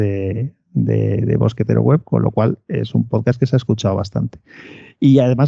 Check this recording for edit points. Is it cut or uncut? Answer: uncut